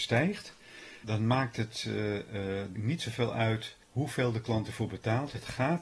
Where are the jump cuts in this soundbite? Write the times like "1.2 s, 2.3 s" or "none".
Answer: 1.0 s, 2.8 s, 3.8 s